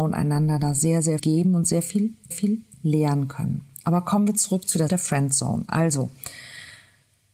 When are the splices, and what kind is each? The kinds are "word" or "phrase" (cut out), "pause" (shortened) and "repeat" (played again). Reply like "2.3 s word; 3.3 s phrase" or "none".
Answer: 1.2 s word; 2.3 s repeat; 4.9 s phrase